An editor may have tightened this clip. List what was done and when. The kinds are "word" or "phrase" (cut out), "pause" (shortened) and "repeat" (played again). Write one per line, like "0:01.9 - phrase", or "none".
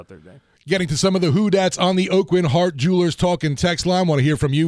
none